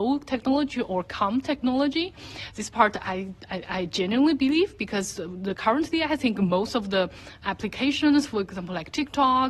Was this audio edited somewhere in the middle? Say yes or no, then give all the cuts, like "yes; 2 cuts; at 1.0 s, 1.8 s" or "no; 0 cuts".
yes; 1 cut; at 7.4 s